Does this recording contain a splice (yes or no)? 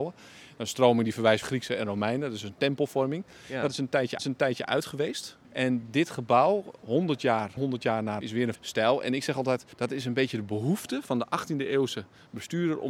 yes